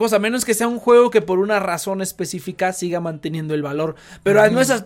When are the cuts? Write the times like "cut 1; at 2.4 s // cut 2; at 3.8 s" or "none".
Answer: none